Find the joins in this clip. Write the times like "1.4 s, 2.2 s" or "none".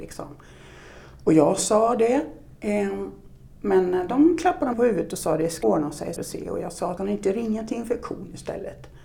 4.7 s, 5.6 s, 6.2 s, 7.0 s

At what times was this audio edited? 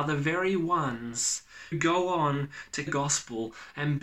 1.7 s, 2.9 s

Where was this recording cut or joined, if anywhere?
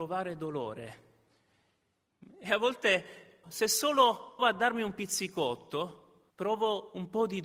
3.4 s, 4.4 s, 6.3 s

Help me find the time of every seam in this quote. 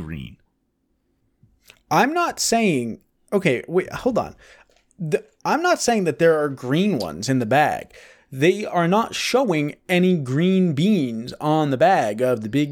none

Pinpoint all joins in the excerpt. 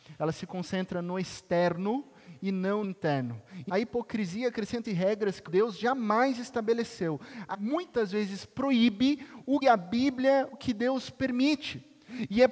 2.8 s, 3.7 s, 4.8 s, 5.5 s, 7.5 s, 9.6 s, 10.5 s

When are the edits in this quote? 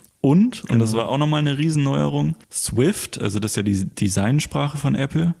2.4 s

